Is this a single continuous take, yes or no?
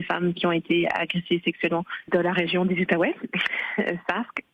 no